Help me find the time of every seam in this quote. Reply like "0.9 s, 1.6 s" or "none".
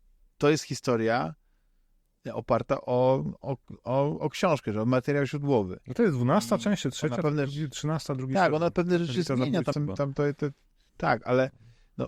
9.7 s